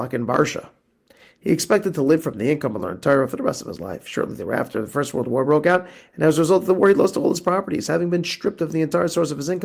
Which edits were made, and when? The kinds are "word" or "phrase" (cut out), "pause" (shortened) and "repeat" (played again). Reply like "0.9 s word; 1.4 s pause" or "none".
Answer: none